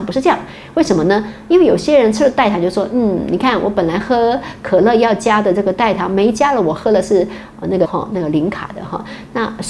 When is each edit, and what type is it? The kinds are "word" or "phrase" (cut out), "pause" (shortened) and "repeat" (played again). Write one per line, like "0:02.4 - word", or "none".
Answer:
0:07.8 - word